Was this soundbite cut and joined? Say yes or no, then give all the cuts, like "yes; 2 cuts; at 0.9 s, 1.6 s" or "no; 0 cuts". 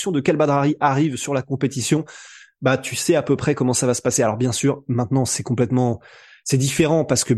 no; 0 cuts